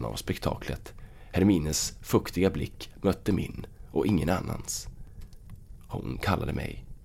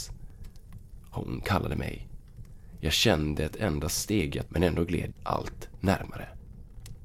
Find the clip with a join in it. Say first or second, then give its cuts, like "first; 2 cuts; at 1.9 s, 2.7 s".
second; 3 cuts; at 3.4 s, 4.5 s, 5.1 s